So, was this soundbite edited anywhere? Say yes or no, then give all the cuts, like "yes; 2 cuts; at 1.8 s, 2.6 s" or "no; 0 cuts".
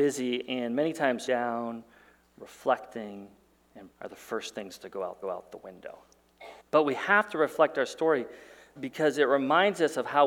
yes; 5 cuts; at 1.3 s, 3.9 s, 5.2 s, 6.6 s, 8.8 s